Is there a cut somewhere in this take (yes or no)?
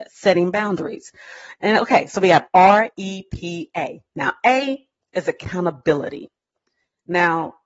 no